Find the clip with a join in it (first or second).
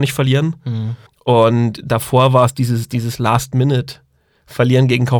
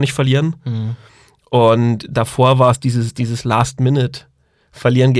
first